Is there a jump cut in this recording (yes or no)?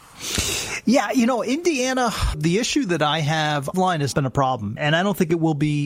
yes